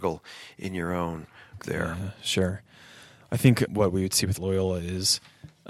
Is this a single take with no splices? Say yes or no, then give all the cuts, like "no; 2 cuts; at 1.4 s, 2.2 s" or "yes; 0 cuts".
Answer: no; 3 cuts; at 1.6 s, 3.7 s, 4.4 s